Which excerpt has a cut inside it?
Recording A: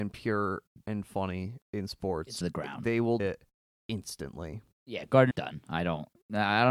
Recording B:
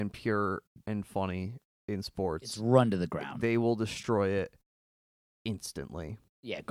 A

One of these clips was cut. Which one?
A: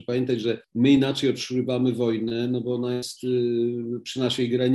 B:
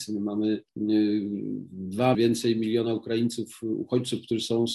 B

